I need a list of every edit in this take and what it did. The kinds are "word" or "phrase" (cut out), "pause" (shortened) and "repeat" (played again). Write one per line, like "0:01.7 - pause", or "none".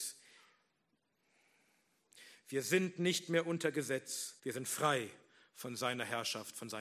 0:04.4 - pause

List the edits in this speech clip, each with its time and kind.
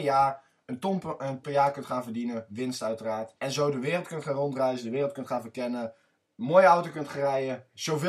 0:01.4 - word
0:03.4 - pause

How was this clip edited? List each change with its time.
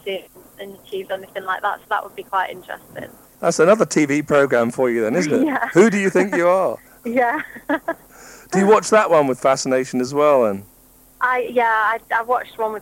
none

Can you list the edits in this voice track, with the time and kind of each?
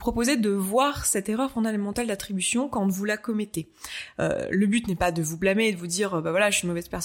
none

